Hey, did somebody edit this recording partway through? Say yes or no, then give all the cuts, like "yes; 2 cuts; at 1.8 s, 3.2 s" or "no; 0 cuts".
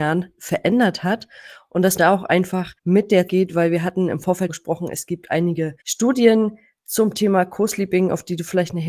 yes; 5 cuts; at 2.0 s, 2.8 s, 3.3 s, 4.5 s, 5.8 s